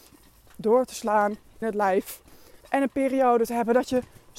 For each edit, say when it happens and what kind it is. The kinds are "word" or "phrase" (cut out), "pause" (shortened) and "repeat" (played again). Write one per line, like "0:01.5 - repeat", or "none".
0:01.6 - word
0:02.6 - pause